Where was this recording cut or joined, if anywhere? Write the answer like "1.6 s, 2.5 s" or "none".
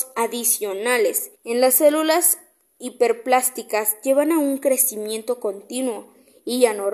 1.3 s